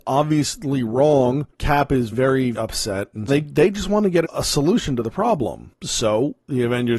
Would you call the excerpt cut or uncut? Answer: cut